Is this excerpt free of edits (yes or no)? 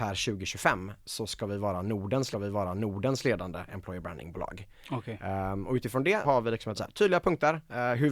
no